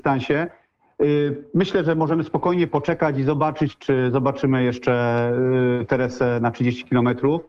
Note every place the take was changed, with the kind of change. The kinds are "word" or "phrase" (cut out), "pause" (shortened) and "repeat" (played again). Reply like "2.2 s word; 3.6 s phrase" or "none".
none